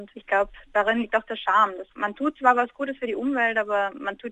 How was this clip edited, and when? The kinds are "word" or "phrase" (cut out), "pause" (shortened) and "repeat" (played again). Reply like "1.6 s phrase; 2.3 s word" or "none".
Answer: none